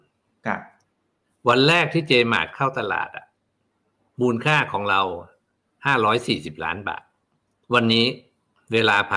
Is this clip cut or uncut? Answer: uncut